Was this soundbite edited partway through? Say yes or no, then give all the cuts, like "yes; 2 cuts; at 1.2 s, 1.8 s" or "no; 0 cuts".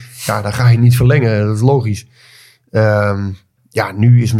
no; 0 cuts